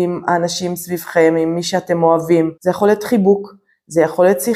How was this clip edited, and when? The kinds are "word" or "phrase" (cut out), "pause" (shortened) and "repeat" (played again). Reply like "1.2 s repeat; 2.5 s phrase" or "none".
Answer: 2.6 s pause